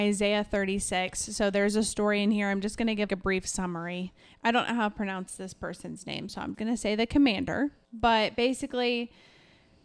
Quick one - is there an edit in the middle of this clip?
yes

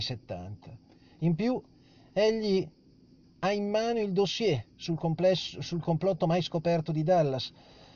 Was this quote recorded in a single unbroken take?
yes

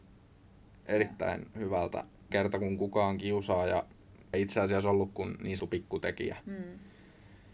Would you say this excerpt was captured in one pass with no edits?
no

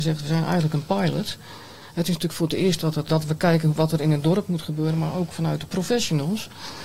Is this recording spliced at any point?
yes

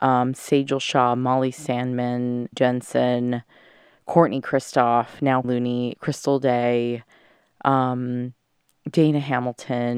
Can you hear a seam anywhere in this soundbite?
yes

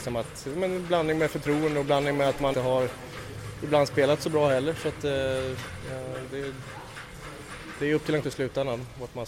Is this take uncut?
no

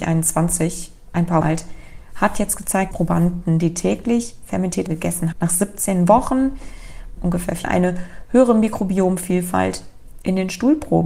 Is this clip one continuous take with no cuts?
no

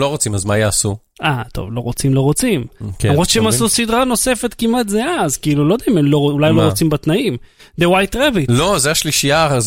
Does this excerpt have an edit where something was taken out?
no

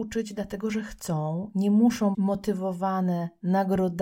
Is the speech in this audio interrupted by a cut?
yes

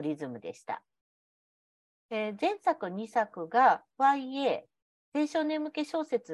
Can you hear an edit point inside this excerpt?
no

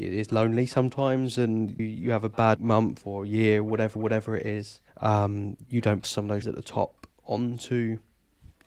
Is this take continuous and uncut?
no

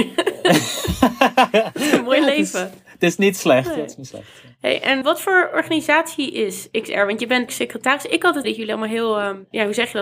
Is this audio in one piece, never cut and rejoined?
no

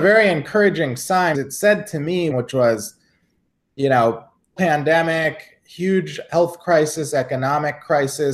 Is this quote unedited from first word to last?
no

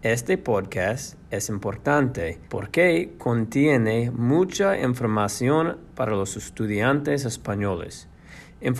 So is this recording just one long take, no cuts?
no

